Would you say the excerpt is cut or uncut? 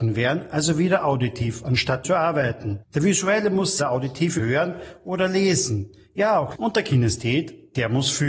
cut